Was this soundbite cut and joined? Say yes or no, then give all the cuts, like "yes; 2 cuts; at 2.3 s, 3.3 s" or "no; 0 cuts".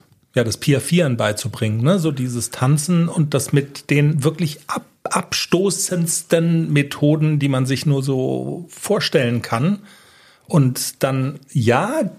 no; 0 cuts